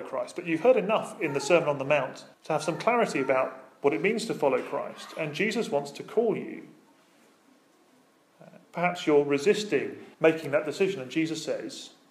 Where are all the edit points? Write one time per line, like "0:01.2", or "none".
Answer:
0:02.3
0:08.6
0:10.1